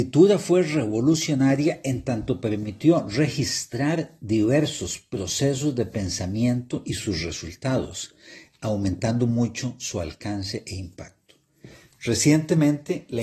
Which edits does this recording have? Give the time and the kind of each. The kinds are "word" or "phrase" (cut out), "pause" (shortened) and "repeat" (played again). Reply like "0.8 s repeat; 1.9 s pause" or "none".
none